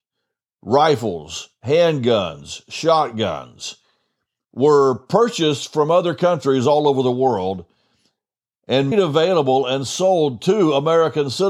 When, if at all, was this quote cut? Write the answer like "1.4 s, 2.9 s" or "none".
8.9 s